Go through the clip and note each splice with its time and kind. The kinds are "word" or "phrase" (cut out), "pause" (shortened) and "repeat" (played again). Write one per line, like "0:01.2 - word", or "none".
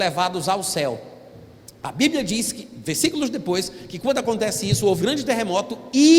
0:05.0 - word